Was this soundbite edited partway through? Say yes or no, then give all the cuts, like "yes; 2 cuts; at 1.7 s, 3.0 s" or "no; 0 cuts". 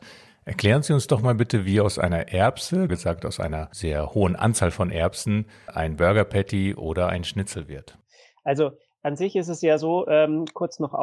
yes; 2 cuts; at 2.9 s, 5.7 s